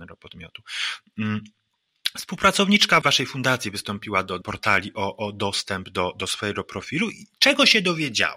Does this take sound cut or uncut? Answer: cut